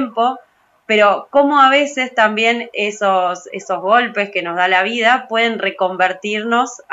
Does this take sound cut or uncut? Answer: uncut